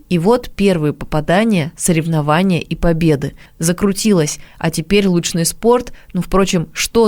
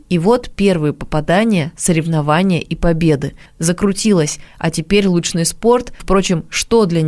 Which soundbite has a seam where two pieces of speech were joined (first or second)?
second